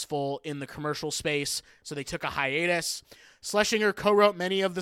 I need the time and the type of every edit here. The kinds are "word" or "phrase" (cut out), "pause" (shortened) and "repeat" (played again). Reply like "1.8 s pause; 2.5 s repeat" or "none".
none

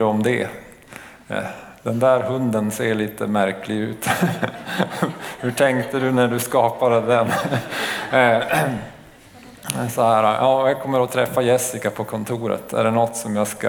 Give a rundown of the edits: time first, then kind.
none

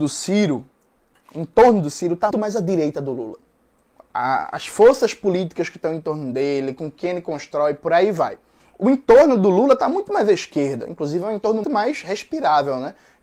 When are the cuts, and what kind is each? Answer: 2.3 s word; 11.6 s word

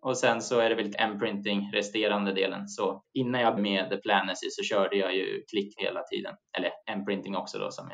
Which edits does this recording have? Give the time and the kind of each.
0.9 s phrase; 3.0 s pause; 3.6 s word; 5.8 s word; 6.8 s pause

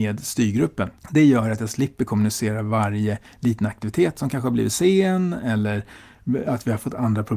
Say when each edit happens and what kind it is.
1.0 s pause

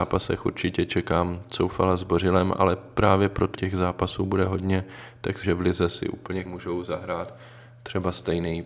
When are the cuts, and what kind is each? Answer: 3.5 s word; 5.4 s word; 6.4 s word

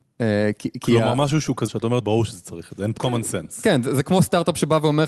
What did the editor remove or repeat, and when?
1.7 s word; 2.0 s word; 3.0 s word

